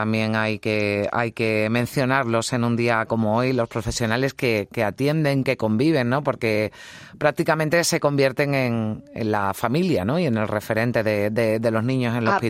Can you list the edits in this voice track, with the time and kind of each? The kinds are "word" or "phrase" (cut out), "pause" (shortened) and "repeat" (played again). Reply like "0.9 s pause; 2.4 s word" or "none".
none